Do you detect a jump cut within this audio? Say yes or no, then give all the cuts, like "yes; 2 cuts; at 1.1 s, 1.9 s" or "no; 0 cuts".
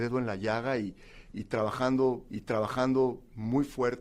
yes; 1 cut; at 2.3 s